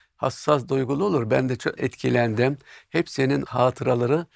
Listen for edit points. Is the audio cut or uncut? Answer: cut